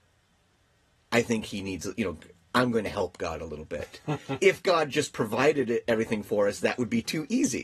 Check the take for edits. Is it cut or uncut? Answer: uncut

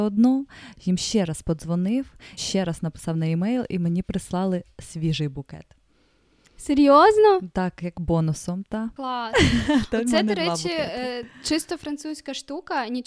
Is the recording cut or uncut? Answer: cut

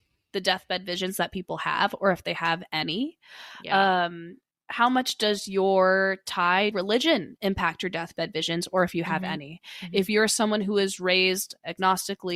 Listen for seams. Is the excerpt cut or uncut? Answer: cut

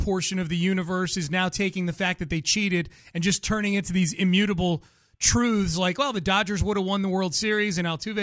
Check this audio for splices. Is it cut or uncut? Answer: uncut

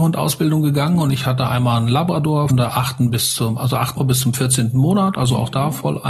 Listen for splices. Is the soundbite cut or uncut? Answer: cut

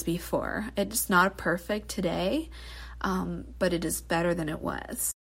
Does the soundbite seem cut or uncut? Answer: uncut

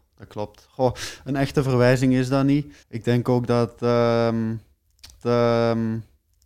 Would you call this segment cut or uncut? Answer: cut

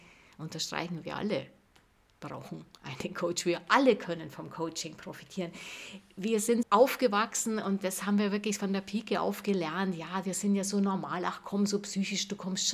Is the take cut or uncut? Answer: cut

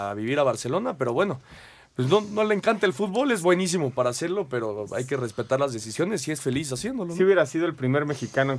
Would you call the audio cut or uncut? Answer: uncut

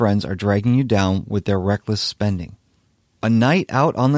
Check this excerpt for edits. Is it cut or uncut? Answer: uncut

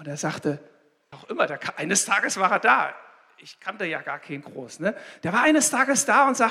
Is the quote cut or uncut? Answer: cut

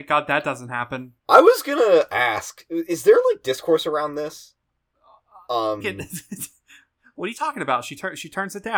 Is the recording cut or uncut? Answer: cut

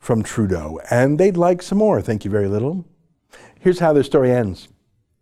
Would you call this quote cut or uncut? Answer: uncut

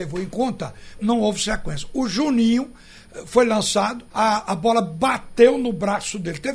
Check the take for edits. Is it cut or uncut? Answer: cut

